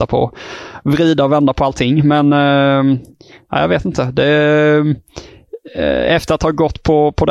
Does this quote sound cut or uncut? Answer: uncut